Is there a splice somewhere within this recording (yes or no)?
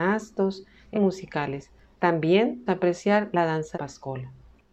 yes